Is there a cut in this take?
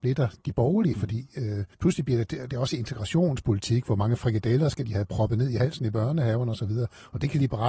yes; 1 cut; at 1.7 s

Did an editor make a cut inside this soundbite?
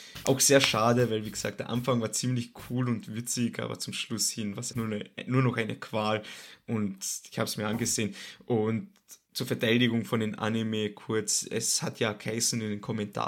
yes; 1 cut; at 4.7 s

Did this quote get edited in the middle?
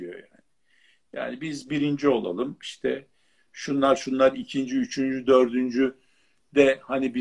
no; 0 cuts

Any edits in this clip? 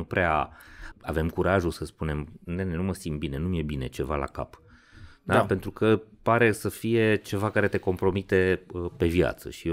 yes; 1 cut; at 0.9 s

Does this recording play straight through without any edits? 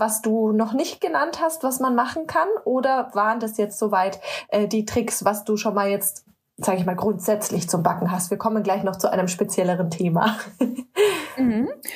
yes; 0 cuts

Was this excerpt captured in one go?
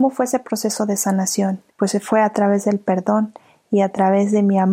no; 1 cut; at 1.7 s

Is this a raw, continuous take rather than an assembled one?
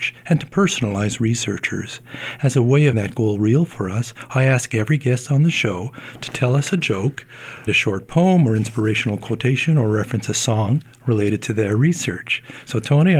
no; 2 cuts; at 2.9 s, 7.7 s

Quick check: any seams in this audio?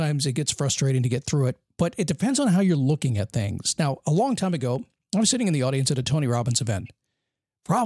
no; 0 cuts

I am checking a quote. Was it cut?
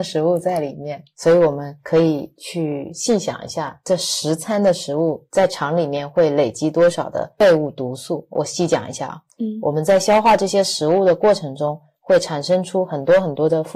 no; 0 cuts

